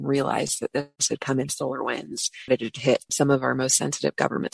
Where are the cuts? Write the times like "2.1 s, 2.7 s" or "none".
1.5 s, 2.5 s, 3.1 s

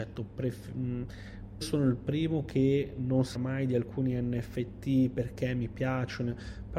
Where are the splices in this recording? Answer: 1.6 s, 3.3 s

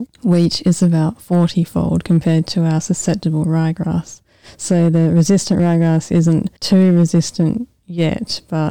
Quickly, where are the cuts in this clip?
6.6 s

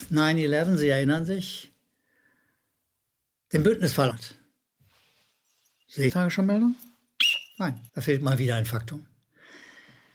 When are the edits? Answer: 4.1 s, 6.1 s, 7.9 s

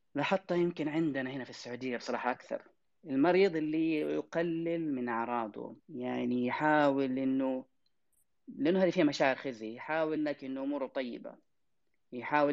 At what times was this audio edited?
5.8 s, 10.2 s

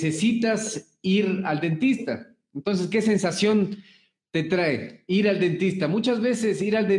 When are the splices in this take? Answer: none

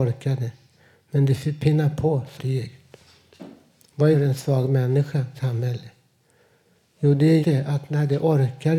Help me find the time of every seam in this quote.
2.4 s, 4.1 s, 5.3 s, 7.4 s

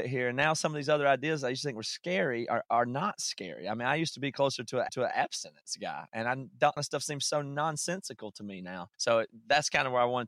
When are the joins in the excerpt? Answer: 4.9 s, 6.8 s, 8.9 s

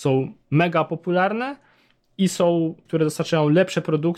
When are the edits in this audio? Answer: 2.9 s

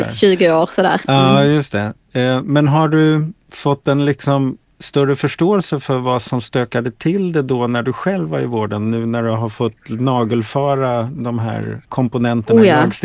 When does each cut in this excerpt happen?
3.4 s, 11.8 s

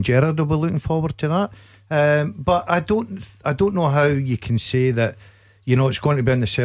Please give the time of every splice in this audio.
none

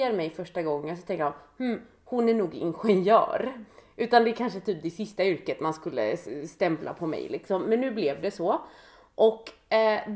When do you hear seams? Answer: none

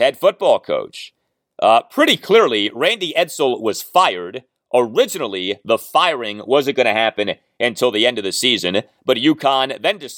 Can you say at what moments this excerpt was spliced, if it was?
none

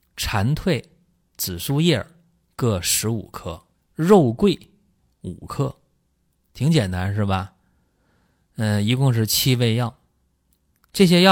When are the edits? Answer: 3.7 s

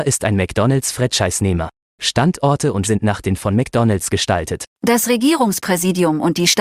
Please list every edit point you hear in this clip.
2.8 s, 3.4 s, 4.7 s

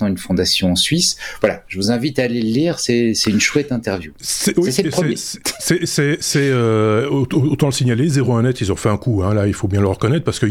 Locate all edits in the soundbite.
none

